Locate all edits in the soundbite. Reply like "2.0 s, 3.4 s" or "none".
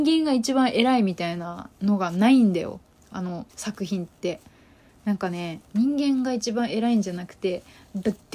3.5 s, 5.6 s